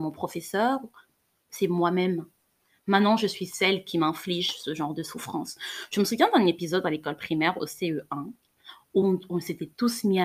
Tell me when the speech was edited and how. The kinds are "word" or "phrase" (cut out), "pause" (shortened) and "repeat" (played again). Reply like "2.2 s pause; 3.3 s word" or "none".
none